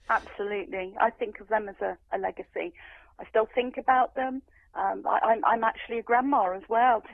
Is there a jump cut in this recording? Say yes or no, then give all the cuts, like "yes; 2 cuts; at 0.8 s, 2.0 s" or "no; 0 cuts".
no; 0 cuts